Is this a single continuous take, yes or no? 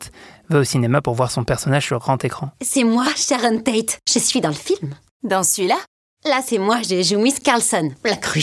yes